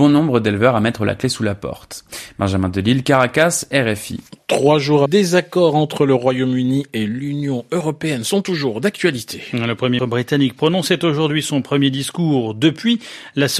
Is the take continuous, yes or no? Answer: no